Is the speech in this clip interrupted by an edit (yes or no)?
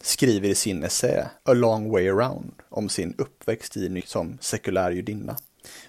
yes